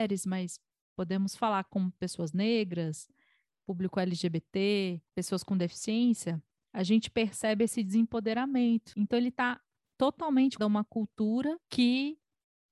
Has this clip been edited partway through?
yes; 1 cut; at 10.6 s

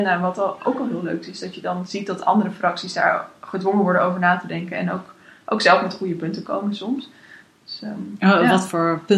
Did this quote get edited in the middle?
no; 0 cuts

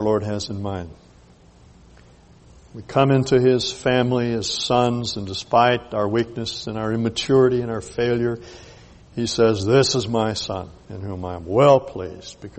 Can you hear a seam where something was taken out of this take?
no; 0 cuts

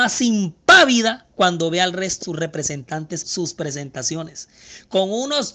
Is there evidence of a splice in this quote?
yes; 2 cuts; at 2.2 s, 3.2 s

